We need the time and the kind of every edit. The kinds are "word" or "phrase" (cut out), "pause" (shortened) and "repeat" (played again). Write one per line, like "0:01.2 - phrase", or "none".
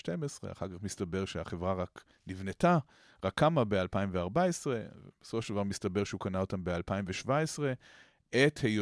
none